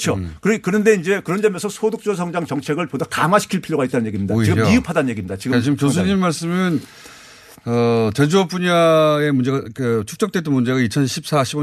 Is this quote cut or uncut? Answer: uncut